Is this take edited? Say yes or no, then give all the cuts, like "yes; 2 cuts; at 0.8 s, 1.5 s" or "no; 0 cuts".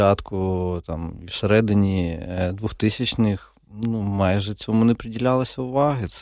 no; 0 cuts